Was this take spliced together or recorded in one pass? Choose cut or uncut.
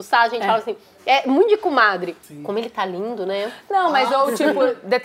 cut